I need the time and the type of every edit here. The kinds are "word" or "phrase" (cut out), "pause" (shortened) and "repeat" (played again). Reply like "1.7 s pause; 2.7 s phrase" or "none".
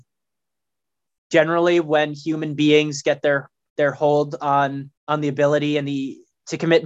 5.0 s pause